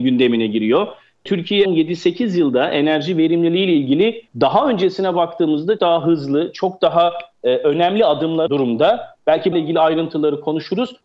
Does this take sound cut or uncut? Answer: cut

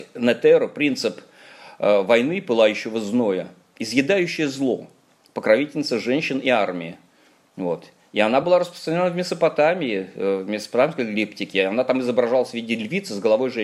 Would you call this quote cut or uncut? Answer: uncut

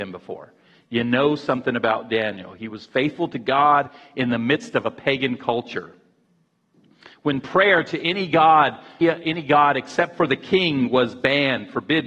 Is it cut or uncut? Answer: cut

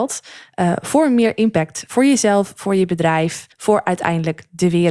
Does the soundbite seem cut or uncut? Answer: cut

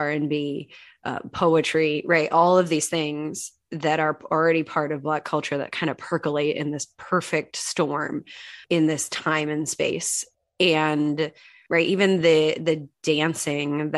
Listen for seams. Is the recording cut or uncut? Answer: uncut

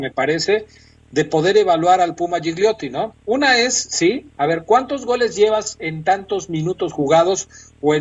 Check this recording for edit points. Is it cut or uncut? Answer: cut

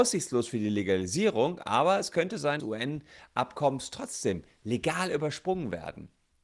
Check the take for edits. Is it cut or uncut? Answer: cut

